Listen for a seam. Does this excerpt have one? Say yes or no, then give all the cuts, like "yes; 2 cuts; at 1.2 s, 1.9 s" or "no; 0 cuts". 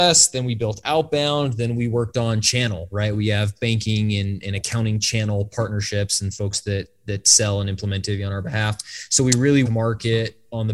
yes; 1 cut; at 9.7 s